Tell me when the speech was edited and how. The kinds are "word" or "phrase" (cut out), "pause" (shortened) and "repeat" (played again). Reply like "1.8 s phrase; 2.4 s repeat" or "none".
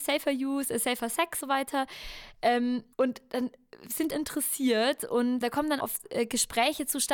1.4 s word; 2.9 s pause; 4.1 s phrase; 5.4 s word; 5.8 s word